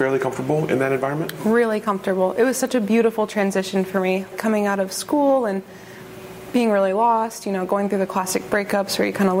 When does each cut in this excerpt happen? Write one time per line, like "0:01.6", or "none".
0:04.3